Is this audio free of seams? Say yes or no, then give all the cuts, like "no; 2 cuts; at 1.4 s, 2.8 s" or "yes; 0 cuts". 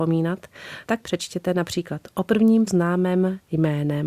no; 2 cuts; at 1.0 s, 2.7 s